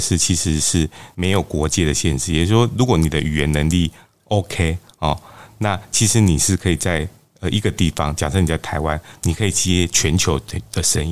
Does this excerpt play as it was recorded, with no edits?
yes; 0 cuts

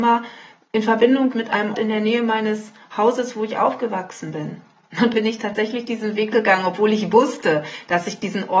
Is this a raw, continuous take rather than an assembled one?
no; 4 cuts; at 1.3 s, 1.7 s, 5.1 s, 6.3 s

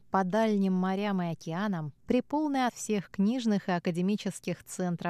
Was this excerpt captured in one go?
no; 1 cut; at 2.7 s

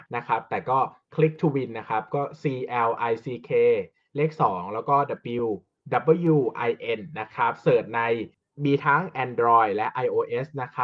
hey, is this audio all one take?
yes; 0 cuts

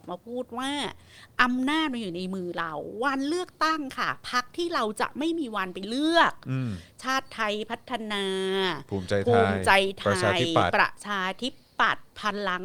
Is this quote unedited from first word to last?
yes; 0 cuts

